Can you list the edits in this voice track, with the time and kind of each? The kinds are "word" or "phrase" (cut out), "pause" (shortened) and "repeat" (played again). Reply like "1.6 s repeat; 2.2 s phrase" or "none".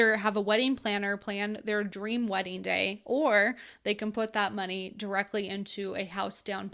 none